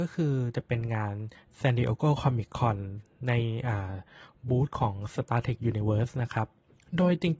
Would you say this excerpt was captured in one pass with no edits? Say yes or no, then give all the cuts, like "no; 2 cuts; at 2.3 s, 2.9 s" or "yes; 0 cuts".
yes; 0 cuts